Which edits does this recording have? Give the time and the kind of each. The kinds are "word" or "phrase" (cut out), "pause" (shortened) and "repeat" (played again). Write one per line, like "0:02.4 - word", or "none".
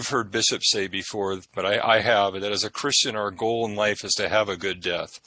none